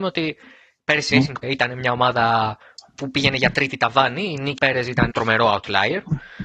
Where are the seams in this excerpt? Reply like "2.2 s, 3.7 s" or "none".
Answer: 1.1 s, 1.4 s, 4.6 s, 5.1 s